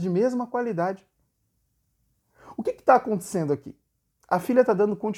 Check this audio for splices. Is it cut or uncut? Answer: uncut